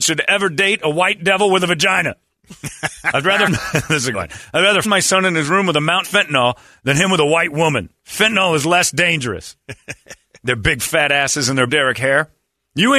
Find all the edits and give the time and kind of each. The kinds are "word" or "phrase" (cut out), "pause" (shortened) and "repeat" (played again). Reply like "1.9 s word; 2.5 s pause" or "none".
3.5 s word; 4.1 s word; 4.8 s word; 6.0 s word; 11.7 s word